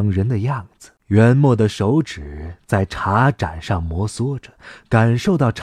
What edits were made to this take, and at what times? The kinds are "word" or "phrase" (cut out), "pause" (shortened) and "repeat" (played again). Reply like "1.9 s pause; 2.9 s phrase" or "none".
1.0 s pause